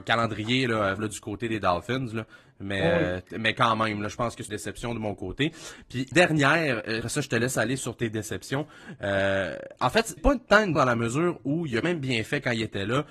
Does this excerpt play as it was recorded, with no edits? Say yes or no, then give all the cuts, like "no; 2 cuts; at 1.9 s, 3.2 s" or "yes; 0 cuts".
no; 8 cuts; at 1.0 s, 4.5 s, 6.1 s, 7.0 s, 7.8 s, 10.2 s, 10.8 s, 11.8 s